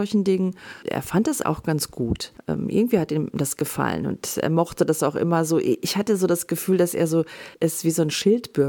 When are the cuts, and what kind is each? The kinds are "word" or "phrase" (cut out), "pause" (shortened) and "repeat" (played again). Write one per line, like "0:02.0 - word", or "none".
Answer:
0:01.4 - word
0:07.5 - pause